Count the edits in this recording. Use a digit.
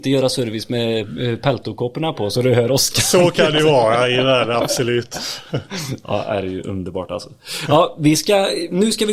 0